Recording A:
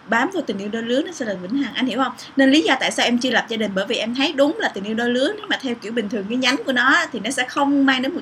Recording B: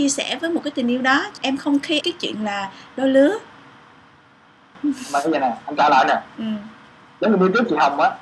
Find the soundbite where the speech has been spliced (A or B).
B